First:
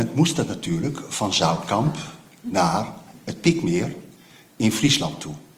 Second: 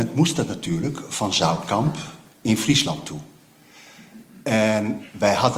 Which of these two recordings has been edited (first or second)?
second